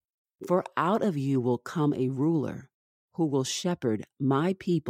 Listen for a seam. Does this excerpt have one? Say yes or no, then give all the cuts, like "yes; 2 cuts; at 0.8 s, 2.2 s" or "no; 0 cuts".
no; 0 cuts